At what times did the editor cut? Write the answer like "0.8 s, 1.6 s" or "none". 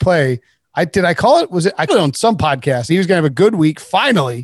1.9 s, 2.9 s